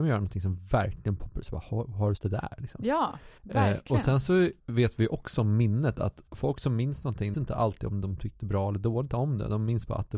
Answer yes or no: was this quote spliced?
yes